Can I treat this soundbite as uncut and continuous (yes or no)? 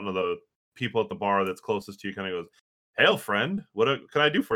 yes